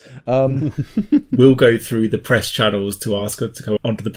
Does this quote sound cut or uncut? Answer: uncut